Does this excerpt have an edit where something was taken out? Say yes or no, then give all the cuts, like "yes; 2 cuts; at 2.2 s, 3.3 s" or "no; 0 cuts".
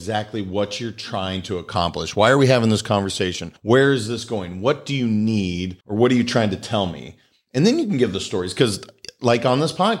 yes; 2 cuts; at 3.6 s, 5.8 s